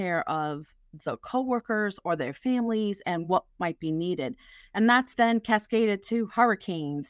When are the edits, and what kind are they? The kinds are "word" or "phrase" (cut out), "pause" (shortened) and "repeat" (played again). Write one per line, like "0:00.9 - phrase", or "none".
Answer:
none